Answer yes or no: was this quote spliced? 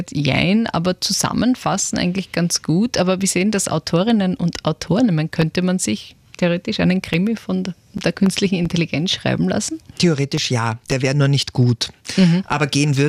yes